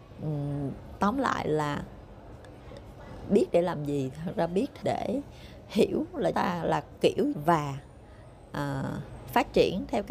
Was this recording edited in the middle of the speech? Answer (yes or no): yes